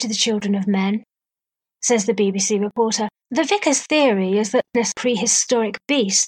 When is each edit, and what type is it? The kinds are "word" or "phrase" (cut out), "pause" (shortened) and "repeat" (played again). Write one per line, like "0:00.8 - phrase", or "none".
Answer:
none